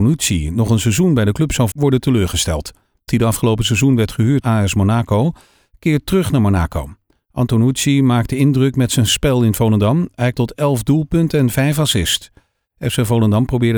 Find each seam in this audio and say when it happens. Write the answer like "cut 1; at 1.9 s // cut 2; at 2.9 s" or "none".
cut 1; at 1.7 s // cut 2; at 3.1 s // cut 3; at 4.4 s // cut 4; at 10.3 s

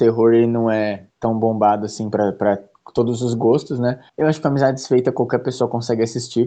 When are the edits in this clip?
cut 1; at 1.1 s // cut 2; at 4.1 s

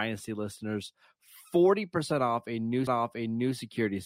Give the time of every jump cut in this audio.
cut 1; at 2.9 s

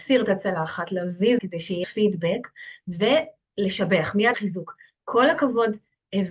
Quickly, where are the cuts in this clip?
cut 1; at 1.4 s // cut 2; at 1.8 s // cut 3; at 4.3 s

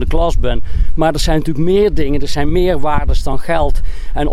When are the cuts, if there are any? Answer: none

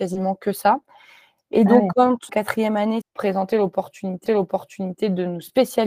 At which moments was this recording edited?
cut 1; at 2.3 s // cut 2; at 3.0 s // cut 3; at 4.3 s

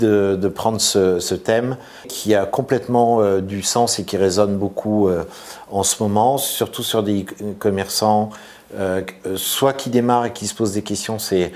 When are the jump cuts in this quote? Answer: none

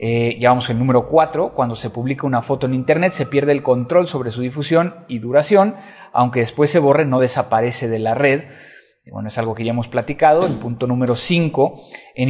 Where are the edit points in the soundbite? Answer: none

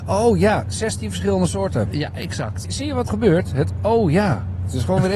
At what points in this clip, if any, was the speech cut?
cut 1; at 2.6 s // cut 2; at 3.1 s

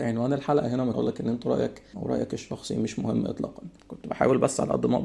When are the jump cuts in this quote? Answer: cut 1; at 0.9 s // cut 2; at 1.9 s // cut 3; at 3.8 s

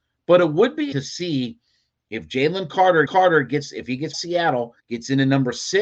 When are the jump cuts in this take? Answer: cut 1; at 0.9 s // cut 2; at 3.1 s // cut 3; at 4.1 s // cut 4; at 4.8 s

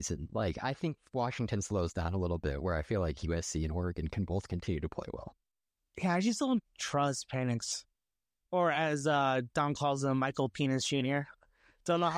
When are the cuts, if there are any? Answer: none

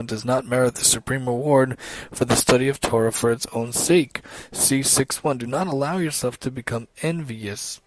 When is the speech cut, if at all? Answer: none

